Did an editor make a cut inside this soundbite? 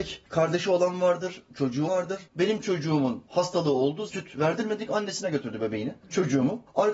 yes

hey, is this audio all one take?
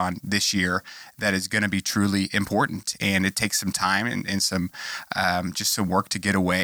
yes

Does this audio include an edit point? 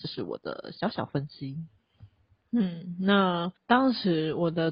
yes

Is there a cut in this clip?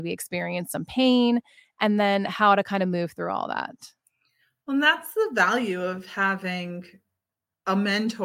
no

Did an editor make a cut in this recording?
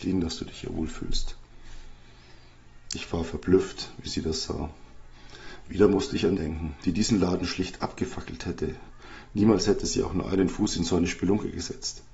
yes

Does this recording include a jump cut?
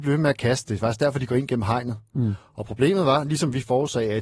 no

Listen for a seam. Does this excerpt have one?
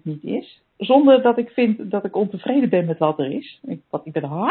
no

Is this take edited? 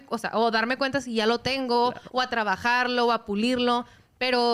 no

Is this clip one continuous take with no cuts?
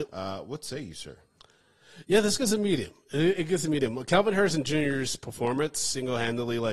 yes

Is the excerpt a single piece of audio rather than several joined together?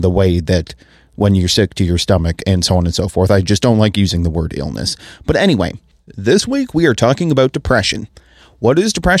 yes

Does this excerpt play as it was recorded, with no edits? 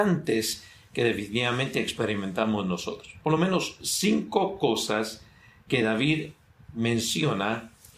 yes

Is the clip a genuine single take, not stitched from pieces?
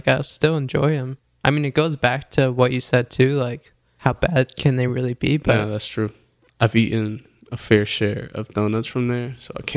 yes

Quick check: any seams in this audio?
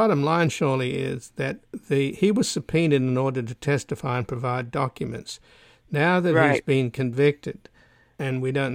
no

